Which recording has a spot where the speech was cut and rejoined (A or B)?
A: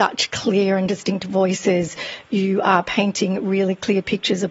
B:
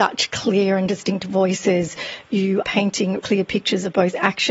B